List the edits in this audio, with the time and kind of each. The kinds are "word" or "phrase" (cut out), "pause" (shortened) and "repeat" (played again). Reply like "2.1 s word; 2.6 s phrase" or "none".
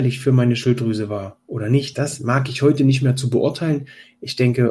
none